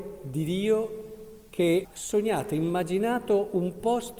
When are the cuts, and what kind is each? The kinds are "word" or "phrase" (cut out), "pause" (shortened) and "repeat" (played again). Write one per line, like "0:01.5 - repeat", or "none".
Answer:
0:01.8 - word